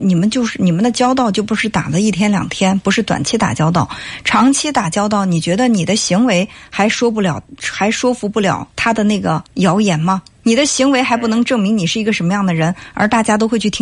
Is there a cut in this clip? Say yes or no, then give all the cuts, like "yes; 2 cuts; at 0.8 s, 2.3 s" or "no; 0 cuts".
yes; 3 cuts; at 8.7 s, 9.5 s, 10.3 s